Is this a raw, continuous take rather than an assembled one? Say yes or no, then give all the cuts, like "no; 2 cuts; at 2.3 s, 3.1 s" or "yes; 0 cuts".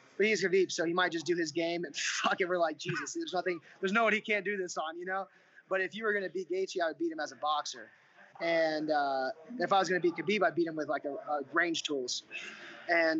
yes; 0 cuts